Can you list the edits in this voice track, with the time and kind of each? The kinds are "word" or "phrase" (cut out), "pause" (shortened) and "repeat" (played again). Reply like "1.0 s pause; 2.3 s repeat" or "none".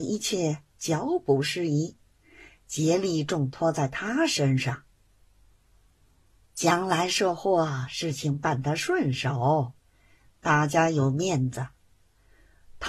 none